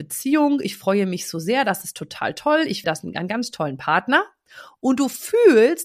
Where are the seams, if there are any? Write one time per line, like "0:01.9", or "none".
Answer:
0:02.8